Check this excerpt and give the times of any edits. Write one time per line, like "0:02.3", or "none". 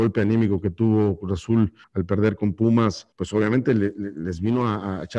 0:01.8
0:03.1